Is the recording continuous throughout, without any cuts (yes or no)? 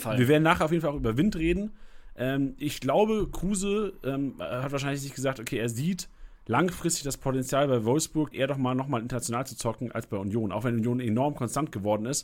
no